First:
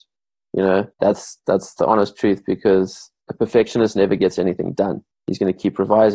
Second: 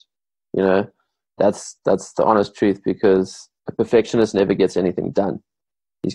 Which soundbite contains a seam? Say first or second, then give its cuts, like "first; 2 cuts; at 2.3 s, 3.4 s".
first; 2 cuts; at 0.9 s, 5.1 s